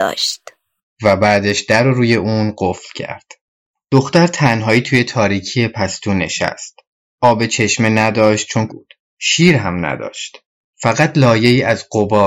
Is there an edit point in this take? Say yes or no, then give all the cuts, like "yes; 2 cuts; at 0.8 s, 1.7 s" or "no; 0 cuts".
yes; 1 cut; at 8.7 s